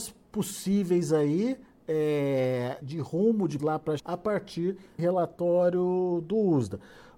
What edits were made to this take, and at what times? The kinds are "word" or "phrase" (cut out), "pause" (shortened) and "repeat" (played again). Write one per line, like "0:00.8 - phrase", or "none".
0:02.8 - word
0:03.6 - word
0:04.0 - word
0:05.0 - word